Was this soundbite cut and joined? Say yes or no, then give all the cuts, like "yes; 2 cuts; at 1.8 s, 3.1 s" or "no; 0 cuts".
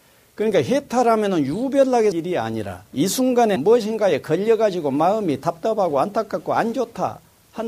yes; 3 cuts; at 2.1 s, 2.9 s, 3.6 s